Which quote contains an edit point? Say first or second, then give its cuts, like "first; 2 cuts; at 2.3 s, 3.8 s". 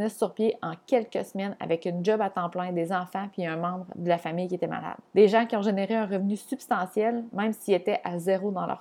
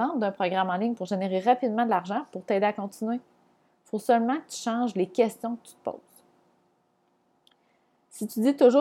first; 1 cut; at 5.1 s